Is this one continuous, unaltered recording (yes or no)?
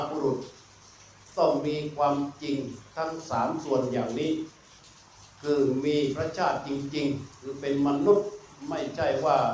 yes